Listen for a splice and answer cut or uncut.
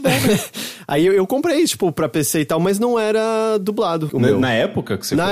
cut